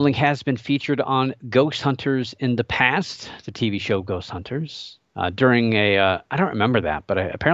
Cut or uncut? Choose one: cut